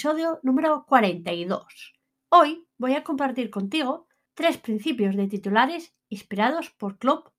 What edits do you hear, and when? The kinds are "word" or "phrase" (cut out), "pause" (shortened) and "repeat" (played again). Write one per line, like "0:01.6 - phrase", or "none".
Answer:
0:02.1 - pause
0:04.3 - pause